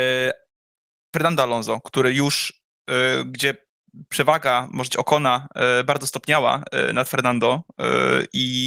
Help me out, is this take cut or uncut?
cut